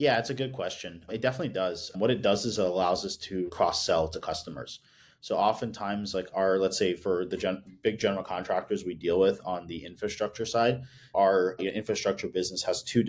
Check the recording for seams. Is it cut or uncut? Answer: cut